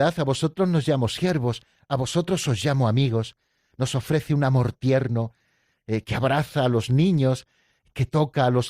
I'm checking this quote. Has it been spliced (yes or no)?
no